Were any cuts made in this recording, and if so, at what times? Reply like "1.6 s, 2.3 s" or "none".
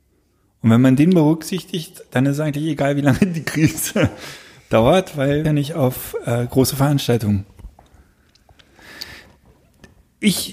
5.4 s